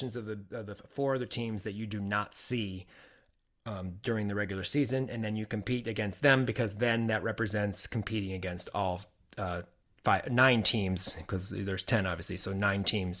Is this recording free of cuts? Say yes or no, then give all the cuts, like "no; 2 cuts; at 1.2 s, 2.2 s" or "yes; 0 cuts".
yes; 0 cuts